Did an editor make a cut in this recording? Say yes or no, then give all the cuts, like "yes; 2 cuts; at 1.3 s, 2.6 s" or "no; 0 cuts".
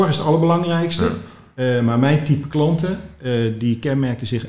no; 0 cuts